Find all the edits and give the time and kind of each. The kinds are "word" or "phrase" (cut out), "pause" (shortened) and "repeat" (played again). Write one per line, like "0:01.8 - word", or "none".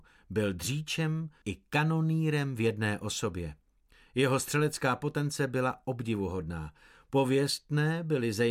0:01.4 - word